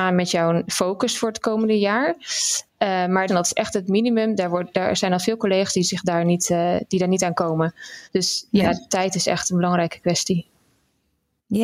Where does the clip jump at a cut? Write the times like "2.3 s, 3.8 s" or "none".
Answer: 3.3 s, 8.1 s